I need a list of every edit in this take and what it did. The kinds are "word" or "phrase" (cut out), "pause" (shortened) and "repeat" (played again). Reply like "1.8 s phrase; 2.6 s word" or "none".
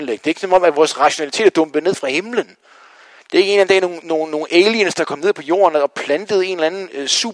none